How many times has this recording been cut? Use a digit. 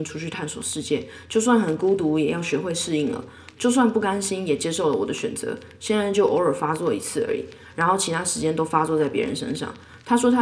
0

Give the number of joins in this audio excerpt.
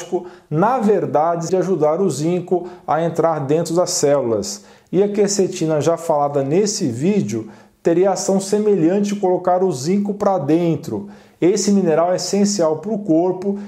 1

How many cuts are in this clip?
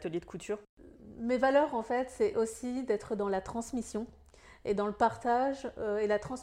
0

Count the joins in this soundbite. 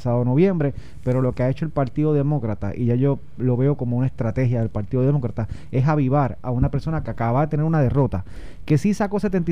0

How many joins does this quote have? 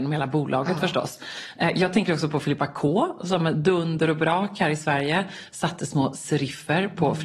0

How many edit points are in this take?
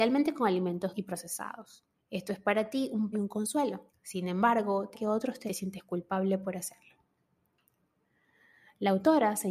6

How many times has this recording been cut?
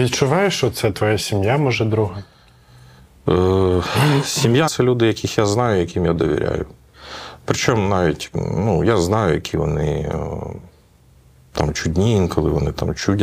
1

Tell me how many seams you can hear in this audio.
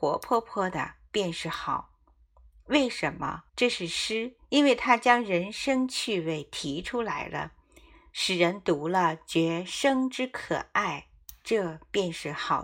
2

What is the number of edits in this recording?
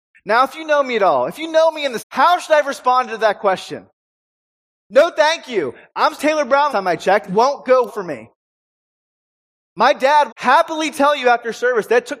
6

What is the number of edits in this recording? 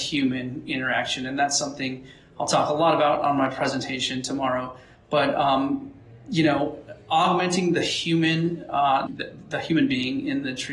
1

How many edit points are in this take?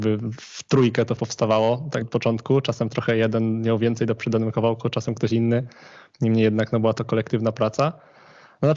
3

